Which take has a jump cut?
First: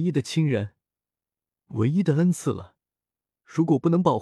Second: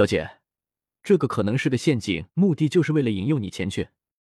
second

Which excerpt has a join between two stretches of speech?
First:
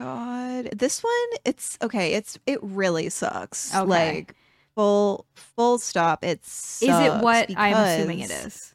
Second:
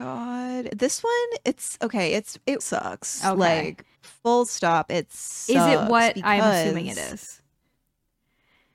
second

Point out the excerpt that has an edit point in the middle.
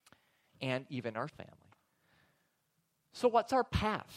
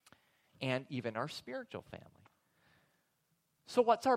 first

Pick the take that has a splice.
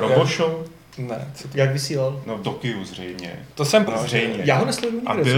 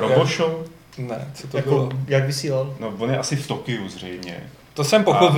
first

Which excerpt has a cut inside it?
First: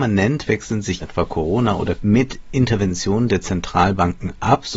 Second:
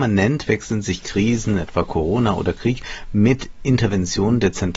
first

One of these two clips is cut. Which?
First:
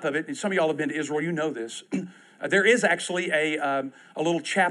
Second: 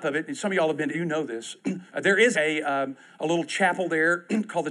second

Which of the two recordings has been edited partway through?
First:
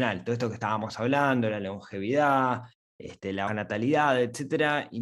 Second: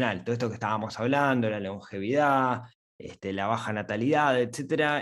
first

